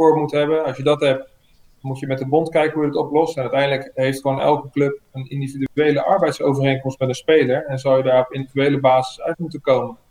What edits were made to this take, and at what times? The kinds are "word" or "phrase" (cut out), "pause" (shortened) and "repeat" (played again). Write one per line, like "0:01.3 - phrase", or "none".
none

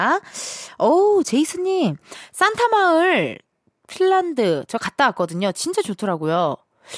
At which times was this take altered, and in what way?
none

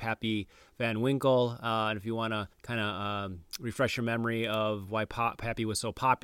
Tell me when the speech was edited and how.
0:02.5 - pause

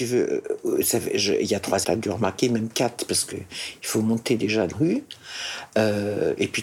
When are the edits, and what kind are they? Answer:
0:01.8 - word
0:03.3 - word
0:04.7 - word

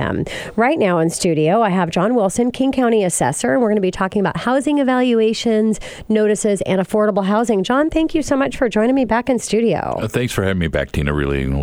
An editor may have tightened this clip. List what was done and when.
none

